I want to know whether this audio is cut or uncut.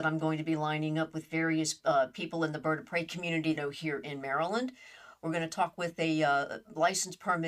cut